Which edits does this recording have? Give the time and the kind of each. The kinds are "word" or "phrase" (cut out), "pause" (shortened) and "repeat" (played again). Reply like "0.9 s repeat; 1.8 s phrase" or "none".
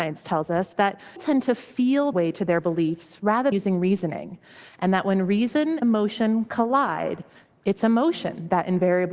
1.2 s word; 2.1 s word; 3.5 s word; 5.8 s word